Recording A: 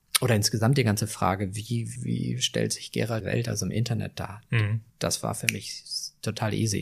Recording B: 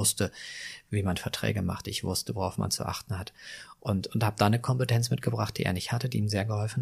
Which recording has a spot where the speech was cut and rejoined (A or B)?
A